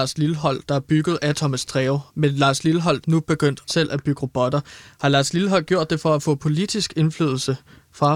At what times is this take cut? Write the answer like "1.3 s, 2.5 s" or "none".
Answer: 2.1 s, 3.0 s, 3.7 s